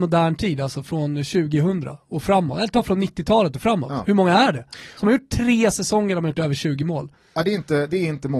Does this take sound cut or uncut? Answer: uncut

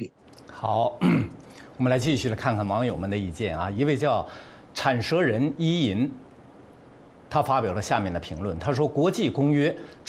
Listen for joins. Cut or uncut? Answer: uncut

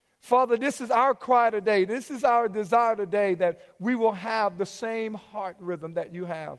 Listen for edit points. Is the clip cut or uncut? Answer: uncut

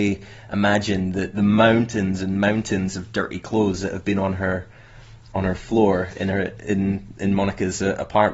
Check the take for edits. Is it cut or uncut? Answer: uncut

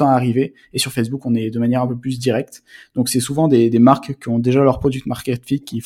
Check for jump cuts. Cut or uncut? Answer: uncut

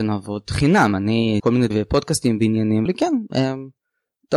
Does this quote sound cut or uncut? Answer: cut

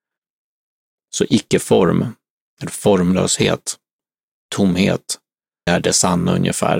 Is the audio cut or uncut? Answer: cut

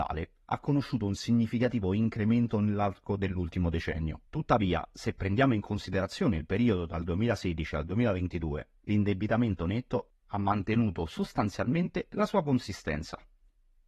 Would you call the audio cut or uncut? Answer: cut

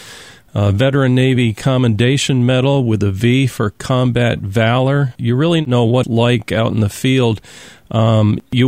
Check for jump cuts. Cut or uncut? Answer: cut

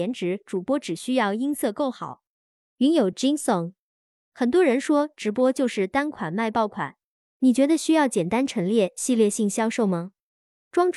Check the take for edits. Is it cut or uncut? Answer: uncut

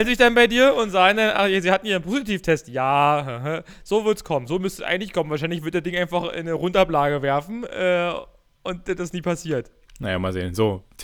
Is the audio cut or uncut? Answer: uncut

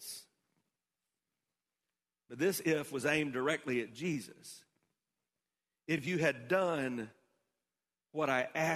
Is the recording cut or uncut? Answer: uncut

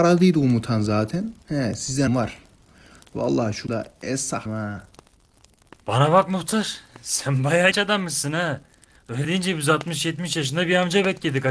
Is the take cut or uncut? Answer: cut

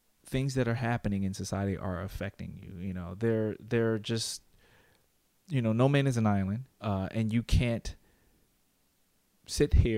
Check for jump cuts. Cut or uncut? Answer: cut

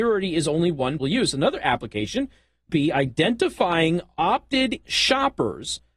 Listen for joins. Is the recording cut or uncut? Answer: cut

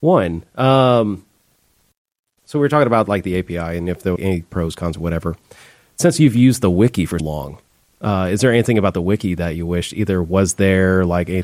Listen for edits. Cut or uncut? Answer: cut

